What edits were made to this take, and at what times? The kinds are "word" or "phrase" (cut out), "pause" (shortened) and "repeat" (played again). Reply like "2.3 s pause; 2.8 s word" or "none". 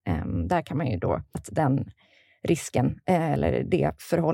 1.3 s word